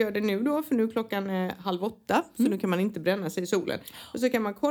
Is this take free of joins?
yes; 0 cuts

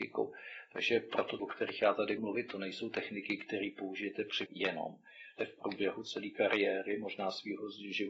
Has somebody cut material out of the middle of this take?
yes; 4 cuts; at 1.4 s, 2.2 s, 4.5 s, 5.4 s

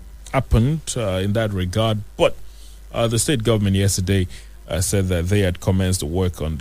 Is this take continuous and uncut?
yes; 0 cuts

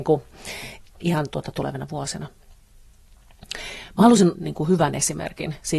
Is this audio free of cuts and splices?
no; 2 cuts; at 1.0 s, 4.3 s

